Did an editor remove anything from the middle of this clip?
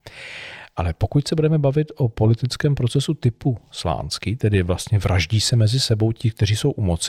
no; 0 cuts

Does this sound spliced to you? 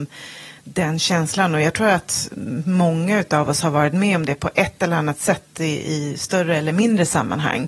no; 0 cuts

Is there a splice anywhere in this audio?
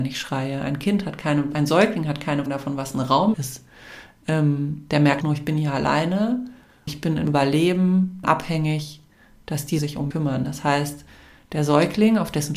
yes; 9 cuts; at 1.5 s, 2.5 s, 3.3 s, 5.2 s, 6.9 s, 7.2 s, 8.2 s, 9.8 s, 10.1 s

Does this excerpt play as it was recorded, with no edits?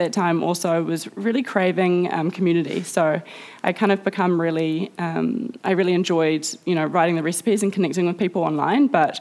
yes; 0 cuts

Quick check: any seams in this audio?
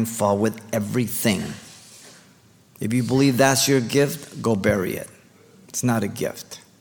no; 0 cuts

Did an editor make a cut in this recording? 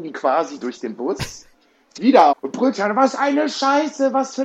yes; 3 cuts; at 2.0 s, 2.3 s, 2.7 s

